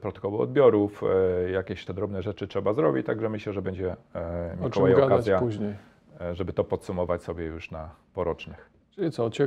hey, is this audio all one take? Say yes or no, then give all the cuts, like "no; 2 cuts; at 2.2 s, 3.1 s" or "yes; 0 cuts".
no; 1 cut; at 1.9 s